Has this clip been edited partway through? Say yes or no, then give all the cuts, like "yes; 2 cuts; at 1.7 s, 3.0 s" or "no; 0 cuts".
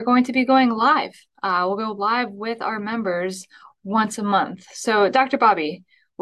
no; 0 cuts